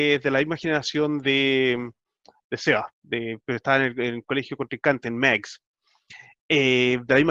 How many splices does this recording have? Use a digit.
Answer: 0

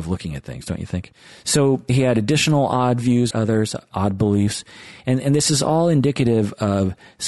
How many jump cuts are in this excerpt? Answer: 1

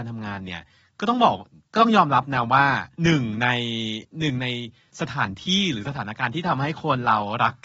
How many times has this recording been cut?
1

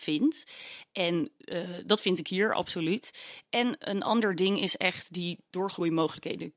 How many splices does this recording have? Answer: 0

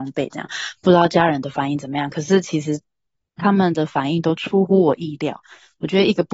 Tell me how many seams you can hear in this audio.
0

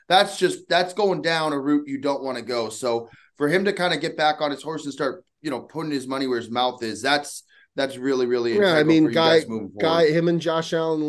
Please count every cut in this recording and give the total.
0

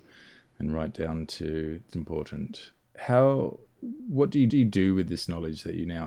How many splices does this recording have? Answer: 3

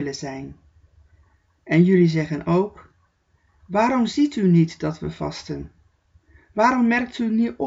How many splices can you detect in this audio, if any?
0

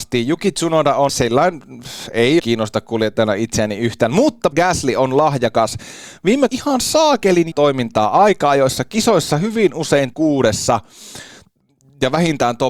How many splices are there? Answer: 6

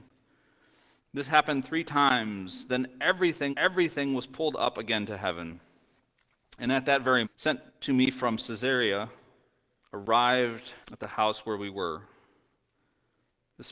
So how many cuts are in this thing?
4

